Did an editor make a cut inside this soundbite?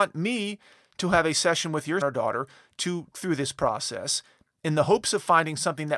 yes; 2 cuts; at 2.0 s, 3.1 s

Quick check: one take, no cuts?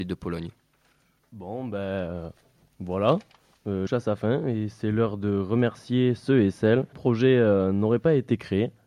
no; 2 cuts; at 3.9 s, 6.9 s

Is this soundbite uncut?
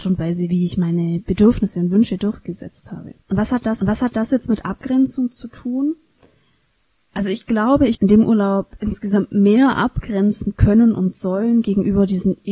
no; 3 cuts; at 3.2 s, 3.8 s, 7.9 s

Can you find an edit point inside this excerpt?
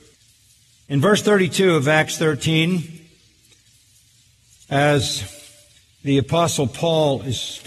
yes; 1 cut; at 5.8 s

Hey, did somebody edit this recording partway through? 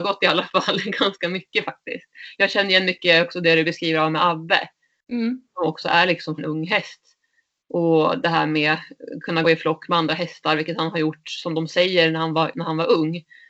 yes; 2 cuts; at 6.4 s, 9.4 s

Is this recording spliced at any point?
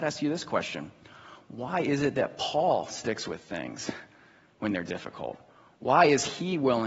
no; 0 cuts

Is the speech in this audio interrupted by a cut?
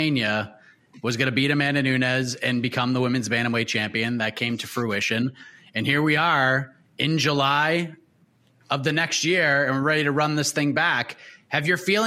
no; 0 cuts

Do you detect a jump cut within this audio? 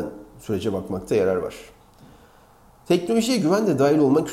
no; 0 cuts

